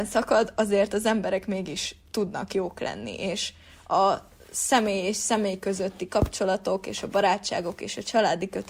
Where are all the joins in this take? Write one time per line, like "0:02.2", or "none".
none